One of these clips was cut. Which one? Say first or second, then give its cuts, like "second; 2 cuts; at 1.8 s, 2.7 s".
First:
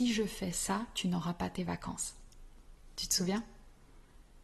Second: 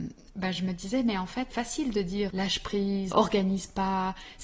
second; 3 cuts; at 1.5 s, 2.3 s, 3.1 s